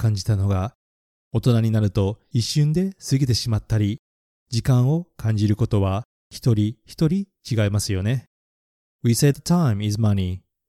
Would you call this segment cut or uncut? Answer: cut